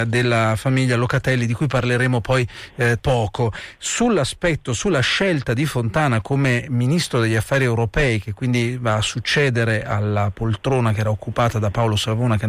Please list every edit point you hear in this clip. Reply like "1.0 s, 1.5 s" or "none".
3.0 s